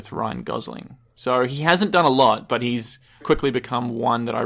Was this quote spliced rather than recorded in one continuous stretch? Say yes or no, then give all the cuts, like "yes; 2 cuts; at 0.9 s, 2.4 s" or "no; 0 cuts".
yes; 1 cut; at 3.2 s